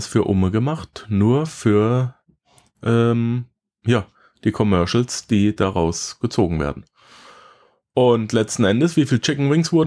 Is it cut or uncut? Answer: uncut